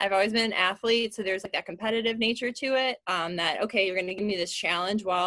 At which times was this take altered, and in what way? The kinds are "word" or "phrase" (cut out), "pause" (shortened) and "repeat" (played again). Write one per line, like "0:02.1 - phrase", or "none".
0:03.0 - pause